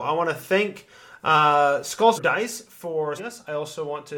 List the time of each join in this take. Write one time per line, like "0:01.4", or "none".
0:02.2
0:03.2